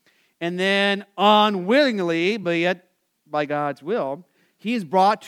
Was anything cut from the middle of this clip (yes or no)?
no